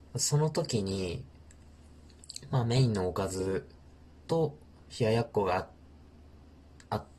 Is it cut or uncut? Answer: uncut